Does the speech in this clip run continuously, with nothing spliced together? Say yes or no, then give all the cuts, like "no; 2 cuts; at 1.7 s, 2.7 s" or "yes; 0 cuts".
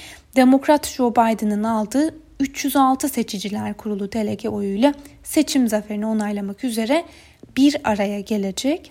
yes; 0 cuts